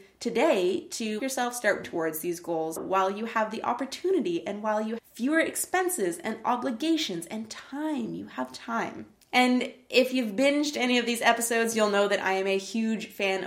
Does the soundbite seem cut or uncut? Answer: cut